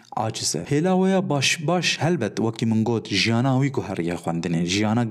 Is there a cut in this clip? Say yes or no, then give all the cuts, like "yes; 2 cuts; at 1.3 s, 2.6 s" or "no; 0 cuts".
no; 0 cuts